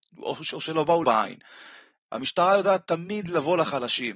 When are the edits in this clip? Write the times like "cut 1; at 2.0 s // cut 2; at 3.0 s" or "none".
cut 1; at 1.0 s